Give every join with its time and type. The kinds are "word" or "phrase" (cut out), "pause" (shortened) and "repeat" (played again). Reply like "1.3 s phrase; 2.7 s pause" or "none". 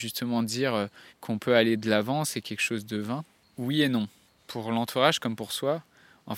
none